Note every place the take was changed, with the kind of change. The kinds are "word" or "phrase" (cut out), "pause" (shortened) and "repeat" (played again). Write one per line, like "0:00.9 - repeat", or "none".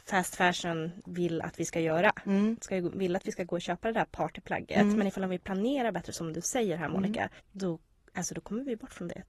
0:07.4 - pause